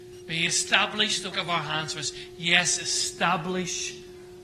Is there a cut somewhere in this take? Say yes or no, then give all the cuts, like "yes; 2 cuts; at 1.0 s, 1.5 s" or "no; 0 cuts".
yes; 1 cut; at 1.3 s